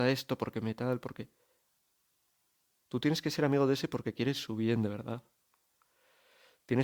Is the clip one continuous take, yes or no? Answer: yes